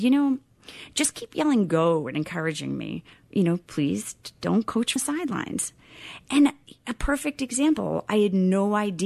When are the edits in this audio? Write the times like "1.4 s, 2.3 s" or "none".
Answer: 5.0 s